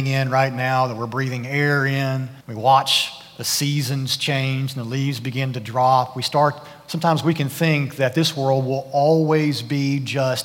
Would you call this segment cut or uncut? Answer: cut